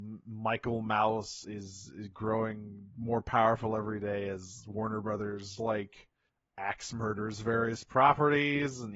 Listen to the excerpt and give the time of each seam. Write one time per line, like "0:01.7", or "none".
0:01.4
0:05.6
0:06.3

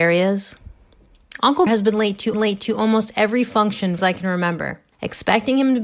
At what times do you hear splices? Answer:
0:01.7
0:02.3
0:04.0
0:04.9

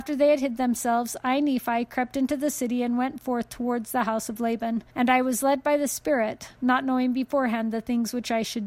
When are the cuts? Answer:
0:04.9

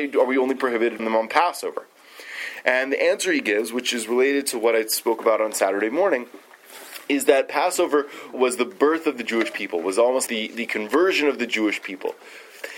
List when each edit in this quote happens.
0:01.0
0:08.3
0:10.3

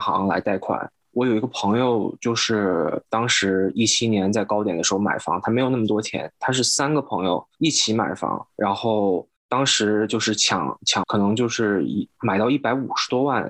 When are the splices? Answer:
0:07.5
0:08.5
0:11.0

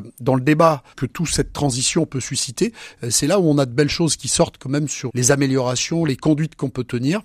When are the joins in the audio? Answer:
0:05.1

